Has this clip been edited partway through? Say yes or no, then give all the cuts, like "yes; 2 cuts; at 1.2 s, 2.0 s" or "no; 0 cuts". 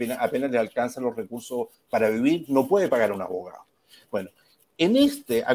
no; 0 cuts